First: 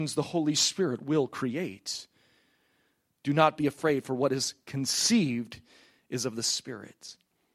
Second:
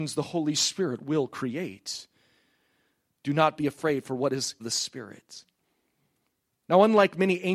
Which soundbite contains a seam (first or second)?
second